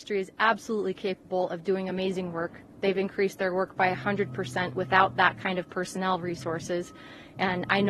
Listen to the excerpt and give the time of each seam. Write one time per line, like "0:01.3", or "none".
none